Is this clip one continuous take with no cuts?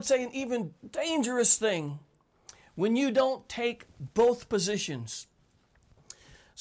yes; 0 cuts

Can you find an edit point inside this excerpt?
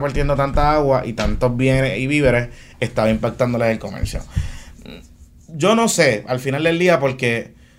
no; 0 cuts

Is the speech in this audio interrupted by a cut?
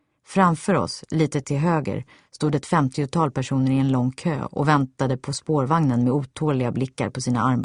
no; 0 cuts

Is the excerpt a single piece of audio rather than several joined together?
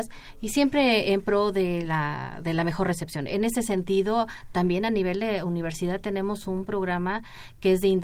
yes; 0 cuts

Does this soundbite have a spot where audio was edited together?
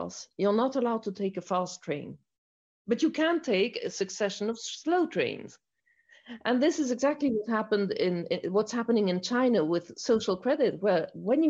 no; 0 cuts

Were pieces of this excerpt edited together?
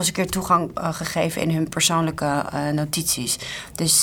no; 0 cuts

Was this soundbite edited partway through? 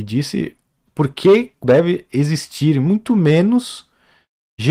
yes; 1 cut; at 1.6 s

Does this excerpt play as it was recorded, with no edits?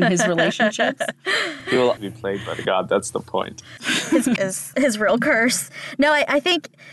no; 4 cuts; at 2.0 s, 2.6 s, 4.4 s, 4.7 s

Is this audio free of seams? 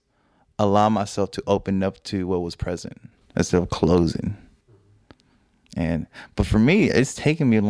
yes; 0 cuts

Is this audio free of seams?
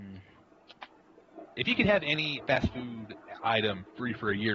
no; 1 cut; at 2.4 s

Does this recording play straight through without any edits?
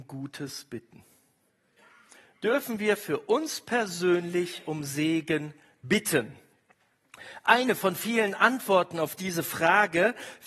yes; 0 cuts

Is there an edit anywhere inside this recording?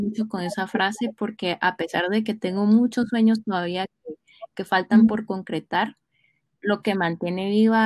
no; 0 cuts

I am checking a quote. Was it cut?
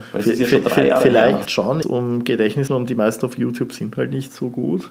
yes; 4 cuts; at 1.5 s, 1.8 s, 2.7 s, 3.2 s

